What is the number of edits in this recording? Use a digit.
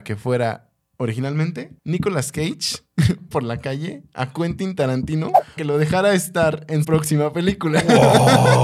4